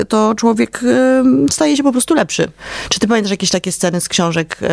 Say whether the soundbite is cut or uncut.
uncut